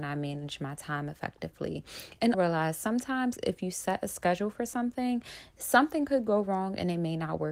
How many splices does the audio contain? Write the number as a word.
one